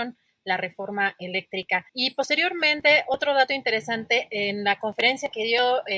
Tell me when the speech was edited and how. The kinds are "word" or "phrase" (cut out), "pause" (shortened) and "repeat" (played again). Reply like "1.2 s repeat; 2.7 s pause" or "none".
1.9 s pause